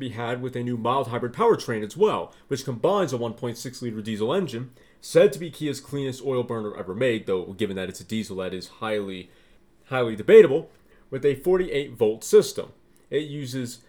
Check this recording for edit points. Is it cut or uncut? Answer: uncut